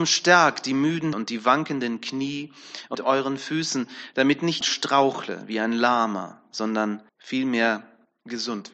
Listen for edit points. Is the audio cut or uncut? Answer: cut